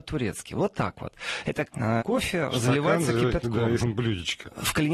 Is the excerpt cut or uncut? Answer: cut